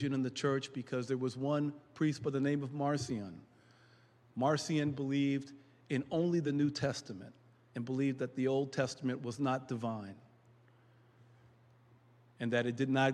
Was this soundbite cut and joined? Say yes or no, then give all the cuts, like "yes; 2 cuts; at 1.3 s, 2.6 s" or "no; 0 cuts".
no; 0 cuts